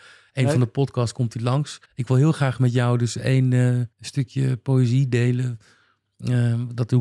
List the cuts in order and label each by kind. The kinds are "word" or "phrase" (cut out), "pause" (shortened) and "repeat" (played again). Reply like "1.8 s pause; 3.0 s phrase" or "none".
1.8 s pause; 3.9 s pause